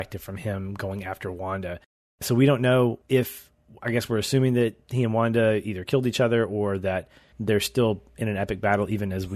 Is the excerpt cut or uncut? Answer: uncut